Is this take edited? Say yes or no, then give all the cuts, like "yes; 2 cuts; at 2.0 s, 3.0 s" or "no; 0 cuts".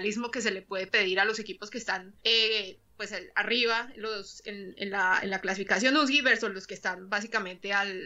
yes; 1 cut; at 2.2 s